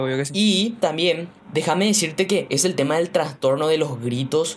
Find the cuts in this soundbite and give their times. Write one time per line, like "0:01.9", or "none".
0:01.4